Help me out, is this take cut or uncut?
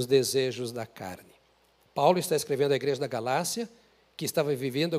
uncut